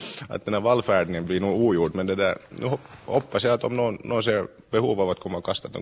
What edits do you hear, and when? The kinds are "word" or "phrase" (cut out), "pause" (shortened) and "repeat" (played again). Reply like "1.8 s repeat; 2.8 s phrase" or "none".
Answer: none